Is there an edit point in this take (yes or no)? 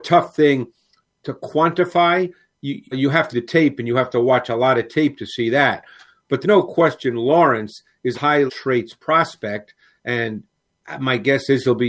yes